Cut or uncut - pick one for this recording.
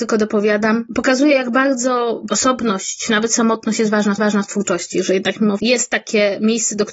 cut